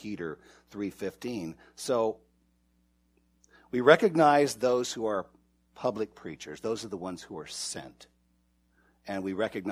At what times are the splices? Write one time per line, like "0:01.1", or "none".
none